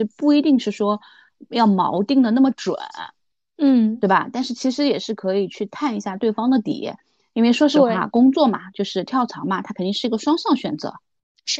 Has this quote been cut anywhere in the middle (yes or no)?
no